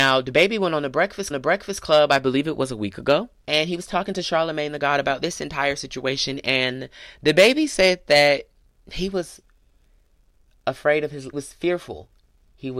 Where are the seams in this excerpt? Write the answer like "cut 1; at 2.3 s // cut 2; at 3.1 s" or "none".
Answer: cut 1; at 1.3 s // cut 2; at 3.4 s // cut 3; at 11.3 s